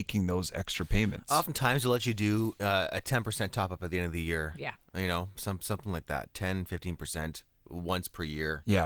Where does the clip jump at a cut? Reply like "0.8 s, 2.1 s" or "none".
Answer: none